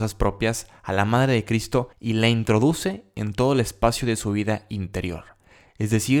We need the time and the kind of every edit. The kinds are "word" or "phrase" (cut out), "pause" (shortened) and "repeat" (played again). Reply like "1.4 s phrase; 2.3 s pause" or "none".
1.9 s pause